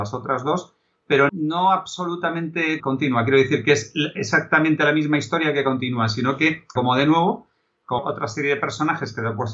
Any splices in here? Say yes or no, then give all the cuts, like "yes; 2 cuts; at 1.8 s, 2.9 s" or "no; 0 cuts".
yes; 4 cuts; at 1.3 s, 2.8 s, 6.8 s, 8.0 s